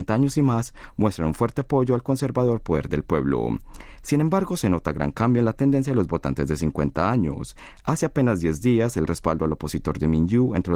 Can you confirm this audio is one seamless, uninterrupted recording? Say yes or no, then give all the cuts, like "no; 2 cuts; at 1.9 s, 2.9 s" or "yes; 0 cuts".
yes; 0 cuts